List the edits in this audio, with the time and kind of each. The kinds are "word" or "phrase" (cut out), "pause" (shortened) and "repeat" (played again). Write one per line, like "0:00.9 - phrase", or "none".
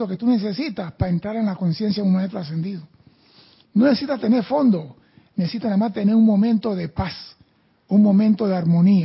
none